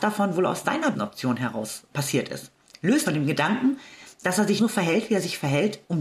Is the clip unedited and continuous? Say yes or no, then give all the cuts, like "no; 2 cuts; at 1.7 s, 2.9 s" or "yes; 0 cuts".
no; 4 cuts; at 0.9 s, 1.9 s, 3.0 s, 4.6 s